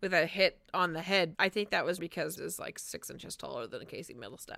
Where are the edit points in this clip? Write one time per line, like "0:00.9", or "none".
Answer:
0:01.3
0:02.0
0:02.4